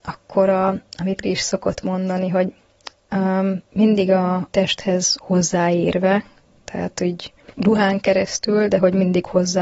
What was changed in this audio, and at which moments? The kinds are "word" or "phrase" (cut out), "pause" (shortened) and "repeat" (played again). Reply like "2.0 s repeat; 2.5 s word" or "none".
1.2 s word; 3.7 s pause; 4.5 s word; 7.5 s pause

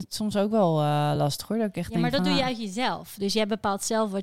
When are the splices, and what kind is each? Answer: none

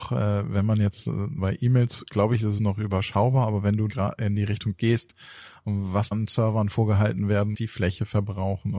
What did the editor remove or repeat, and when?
1.4 s word; 2.6 s word; 3.9 s word; 4.8 s word; 6.1 s word; 7.5 s word

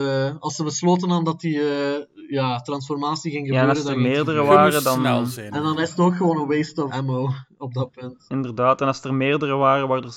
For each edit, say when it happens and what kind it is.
6.9 s word

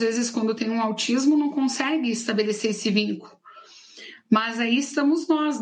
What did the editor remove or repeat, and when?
none

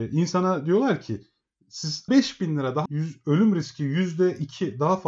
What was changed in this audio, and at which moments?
2.1 s word; 2.9 s word

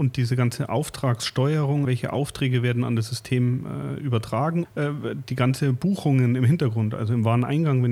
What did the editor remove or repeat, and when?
1.8 s word; 4.6 s word

